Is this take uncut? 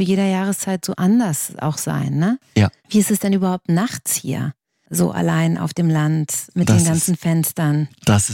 yes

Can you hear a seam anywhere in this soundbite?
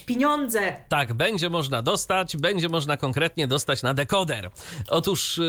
no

